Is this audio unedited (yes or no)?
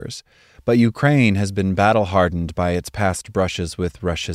yes